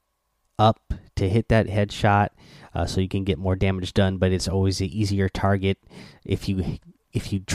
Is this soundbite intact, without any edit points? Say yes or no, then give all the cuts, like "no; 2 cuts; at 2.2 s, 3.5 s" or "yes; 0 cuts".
yes; 0 cuts